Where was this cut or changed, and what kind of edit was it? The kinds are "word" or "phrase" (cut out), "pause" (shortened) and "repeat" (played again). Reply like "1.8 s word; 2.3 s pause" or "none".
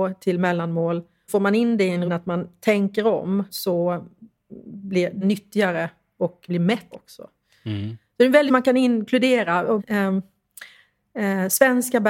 1.3 s word; 2.0 s word; 3.5 s word; 5.2 s word; 6.5 s word; 6.9 s word; 8.5 s word; 9.8 s word